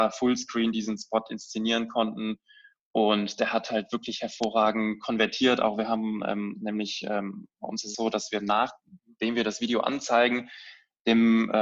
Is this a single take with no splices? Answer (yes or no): no